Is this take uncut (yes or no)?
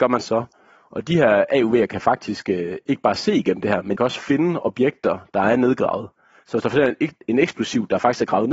no